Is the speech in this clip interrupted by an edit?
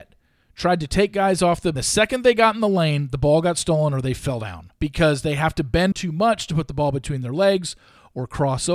yes; 3 cuts; at 1.8 s, 4.8 s, 5.9 s

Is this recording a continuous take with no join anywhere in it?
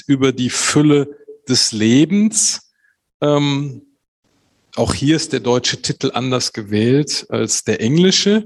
yes; 0 cuts

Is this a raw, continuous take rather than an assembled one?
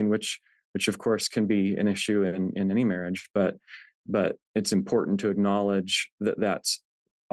no; 2 cuts; at 4.4 s, 6.1 s

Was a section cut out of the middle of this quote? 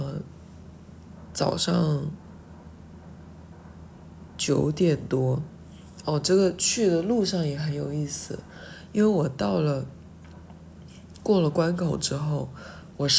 no; 0 cuts

